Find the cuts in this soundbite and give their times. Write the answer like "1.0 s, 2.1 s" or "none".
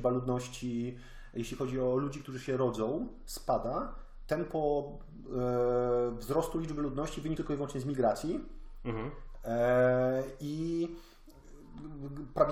7.4 s